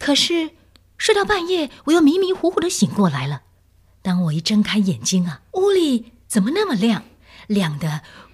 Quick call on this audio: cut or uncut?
cut